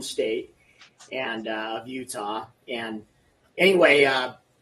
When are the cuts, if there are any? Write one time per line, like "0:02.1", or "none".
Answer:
none